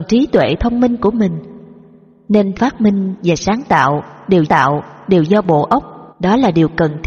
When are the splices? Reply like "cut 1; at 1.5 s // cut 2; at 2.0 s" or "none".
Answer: cut 1; at 2.5 s // cut 2; at 4.4 s // cut 3; at 6.1 s